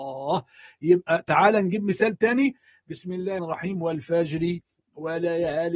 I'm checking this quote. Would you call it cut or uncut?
cut